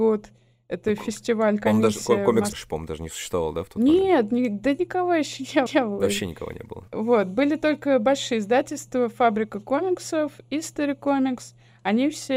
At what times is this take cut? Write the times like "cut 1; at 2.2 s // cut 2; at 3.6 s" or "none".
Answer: cut 1; at 2.5 s // cut 2; at 5.7 s // cut 3; at 6.9 s